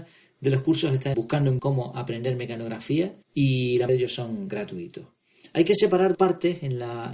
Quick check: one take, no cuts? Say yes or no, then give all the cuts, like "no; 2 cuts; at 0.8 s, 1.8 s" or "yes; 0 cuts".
no; 5 cuts; at 1.1 s, 1.6 s, 3.2 s, 3.9 s, 6.1 s